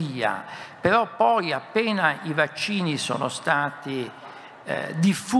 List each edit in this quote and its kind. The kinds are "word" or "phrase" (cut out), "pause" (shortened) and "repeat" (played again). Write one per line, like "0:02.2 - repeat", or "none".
none